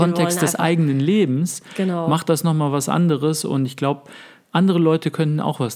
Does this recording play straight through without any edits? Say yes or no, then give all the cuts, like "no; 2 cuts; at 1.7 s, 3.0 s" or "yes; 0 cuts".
yes; 0 cuts